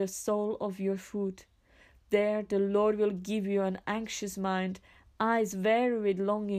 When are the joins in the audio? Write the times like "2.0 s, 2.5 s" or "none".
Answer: none